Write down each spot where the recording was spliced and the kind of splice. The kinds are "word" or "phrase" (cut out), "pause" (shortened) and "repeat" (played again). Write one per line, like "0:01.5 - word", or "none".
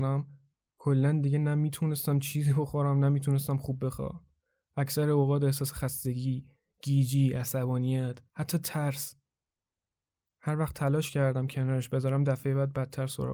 none